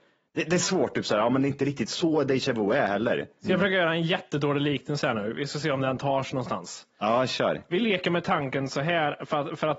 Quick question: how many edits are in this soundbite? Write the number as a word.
zero